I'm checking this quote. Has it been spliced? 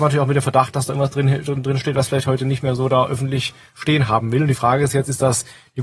no; 0 cuts

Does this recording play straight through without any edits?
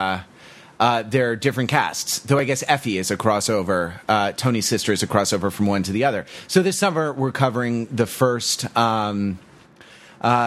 yes; 0 cuts

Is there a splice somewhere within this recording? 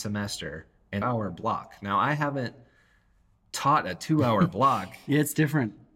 yes; 1 cut; at 1.0 s

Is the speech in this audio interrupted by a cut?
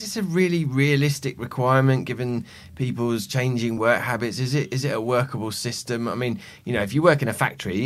no; 0 cuts

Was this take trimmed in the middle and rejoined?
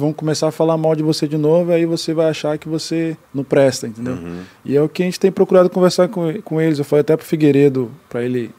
yes; 1 cut; at 3.2 s

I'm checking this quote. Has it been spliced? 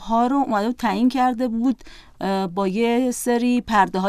no; 0 cuts

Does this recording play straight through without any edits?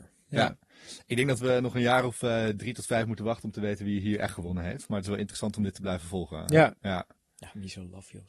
yes; 0 cuts

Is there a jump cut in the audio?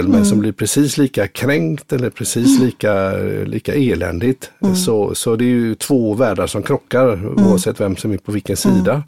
no; 0 cuts

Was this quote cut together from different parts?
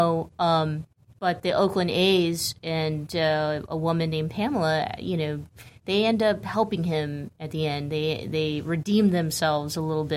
no; 0 cuts

